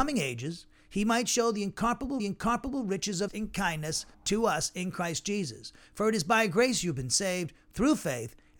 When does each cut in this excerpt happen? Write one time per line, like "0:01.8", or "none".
0:02.2
0:03.3
0:04.1

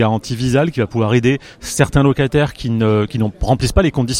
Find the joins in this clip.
0:03.1

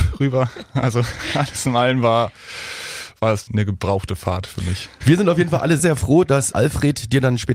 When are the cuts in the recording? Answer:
0:03.5
0:05.8
0:06.5

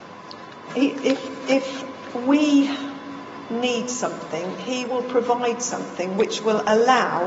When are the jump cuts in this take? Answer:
none

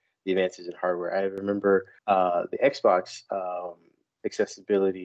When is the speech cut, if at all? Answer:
0:02.0

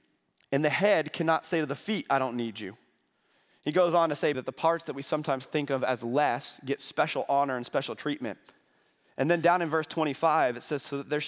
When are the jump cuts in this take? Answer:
0:04.3

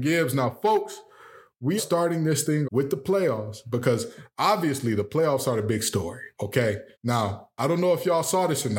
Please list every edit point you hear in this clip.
0:01.8
0:02.6
0:06.9

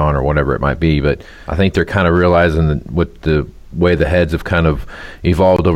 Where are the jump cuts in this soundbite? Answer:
none

